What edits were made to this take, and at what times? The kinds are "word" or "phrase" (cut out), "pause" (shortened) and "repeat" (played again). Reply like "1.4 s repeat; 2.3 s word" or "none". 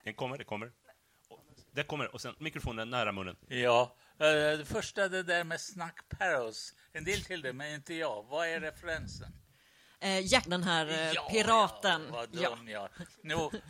2.4 s word; 3.4 s pause; 7.2 s word; 10.5 s word